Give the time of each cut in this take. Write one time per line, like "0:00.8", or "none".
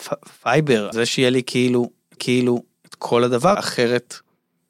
0:00.9
0:02.2
0:03.5